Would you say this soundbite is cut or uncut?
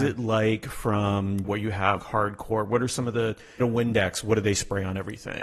cut